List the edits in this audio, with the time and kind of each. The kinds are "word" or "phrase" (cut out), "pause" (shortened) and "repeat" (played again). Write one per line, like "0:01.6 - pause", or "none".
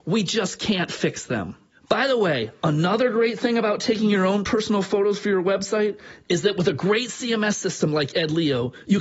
none